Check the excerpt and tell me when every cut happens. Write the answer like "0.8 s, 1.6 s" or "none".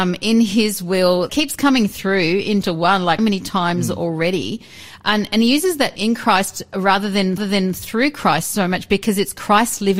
1.3 s, 2.6 s, 3.2 s, 6.0 s, 7.4 s